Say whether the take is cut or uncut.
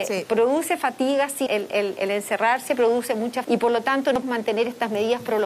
cut